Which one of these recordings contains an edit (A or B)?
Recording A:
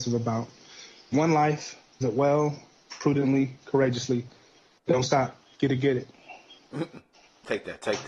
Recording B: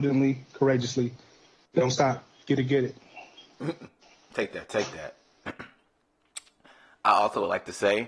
A